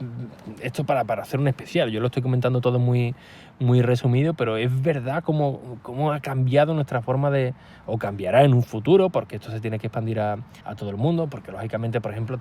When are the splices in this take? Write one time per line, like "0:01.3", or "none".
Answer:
0:10.6